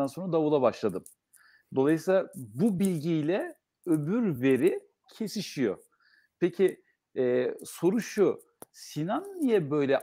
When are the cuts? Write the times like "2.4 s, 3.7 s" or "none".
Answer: none